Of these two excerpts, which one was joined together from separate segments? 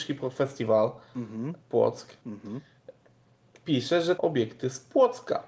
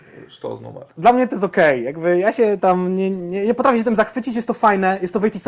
first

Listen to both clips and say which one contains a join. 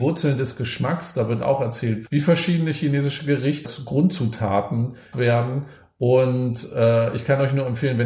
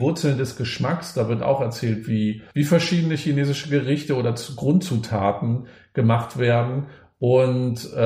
first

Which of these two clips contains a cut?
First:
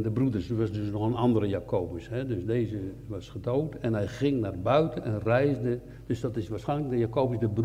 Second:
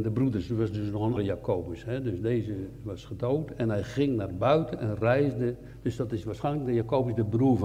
second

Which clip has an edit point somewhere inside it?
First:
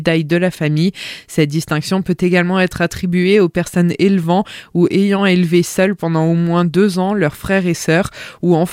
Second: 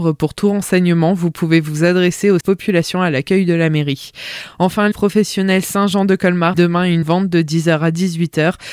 second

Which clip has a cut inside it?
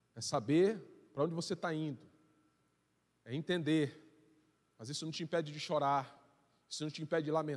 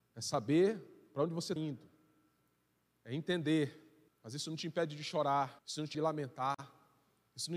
second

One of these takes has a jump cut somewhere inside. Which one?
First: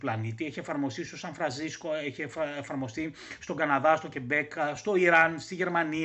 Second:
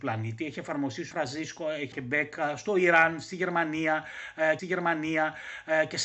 second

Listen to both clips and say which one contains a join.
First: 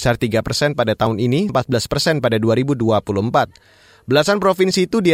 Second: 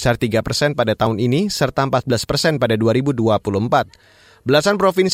first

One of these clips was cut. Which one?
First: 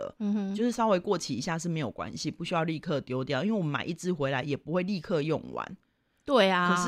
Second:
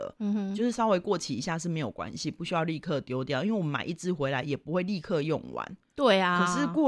second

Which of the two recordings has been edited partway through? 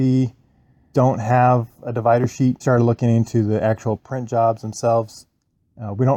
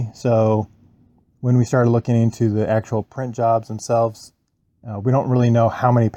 first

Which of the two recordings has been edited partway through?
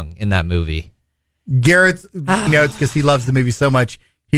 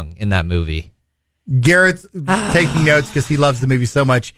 first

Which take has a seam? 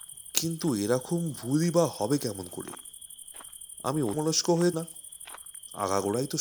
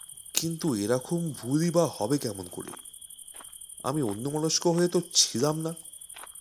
first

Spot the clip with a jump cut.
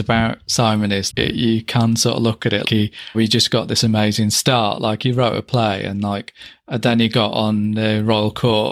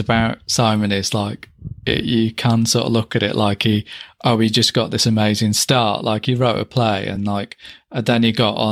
first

